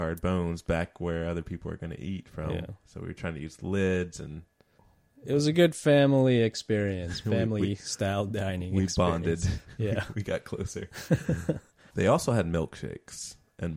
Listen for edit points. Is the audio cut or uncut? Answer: uncut